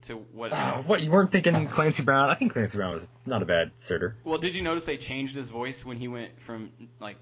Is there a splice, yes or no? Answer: no